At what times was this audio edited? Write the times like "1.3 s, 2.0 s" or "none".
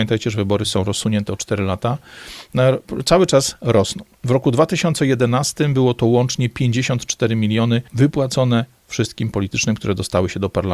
7.9 s, 9.3 s